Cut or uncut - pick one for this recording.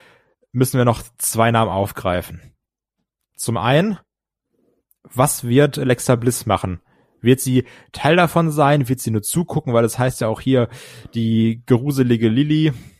uncut